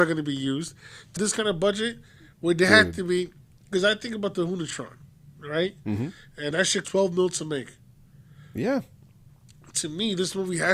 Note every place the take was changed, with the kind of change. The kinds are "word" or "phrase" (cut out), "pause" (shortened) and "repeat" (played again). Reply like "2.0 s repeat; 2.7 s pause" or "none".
1.2 s word; 6.5 s word; 6.8 s word

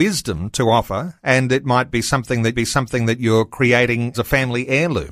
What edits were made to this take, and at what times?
2.5 s repeat; 4.1 s word

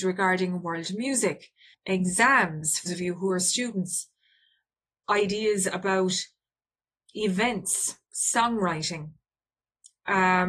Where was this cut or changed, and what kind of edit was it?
1.7 s word; 2.9 s word; 5.0 s word

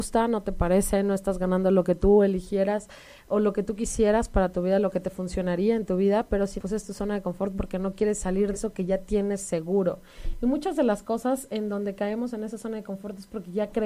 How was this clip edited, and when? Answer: 6.6 s word; 8.5 s word

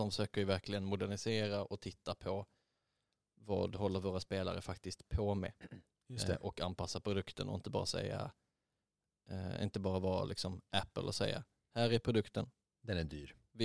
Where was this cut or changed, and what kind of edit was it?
none

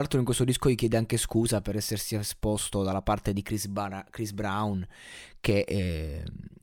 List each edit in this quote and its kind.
none

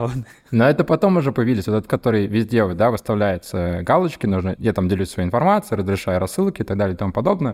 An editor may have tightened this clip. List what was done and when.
1.9 s word

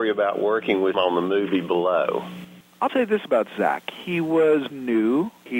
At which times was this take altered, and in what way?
0.9 s word; 2.9 s word; 4.7 s word

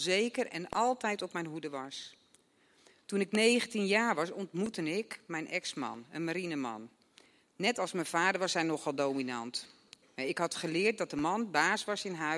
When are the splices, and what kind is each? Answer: none

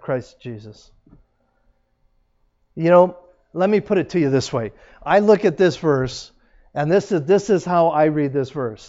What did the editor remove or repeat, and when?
none

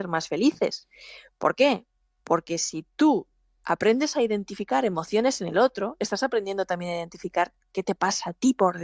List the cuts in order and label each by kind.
none

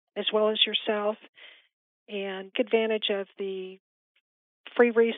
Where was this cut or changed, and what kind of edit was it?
2.5 s word

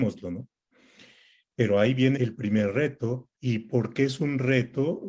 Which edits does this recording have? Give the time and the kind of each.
2.2 s word; 3.3 s pause

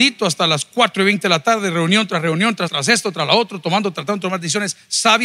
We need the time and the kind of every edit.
2.7 s word

